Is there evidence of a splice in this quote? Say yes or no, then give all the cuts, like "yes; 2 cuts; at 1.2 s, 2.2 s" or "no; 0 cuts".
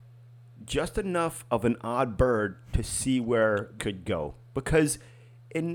yes; 1 cut; at 3.8 s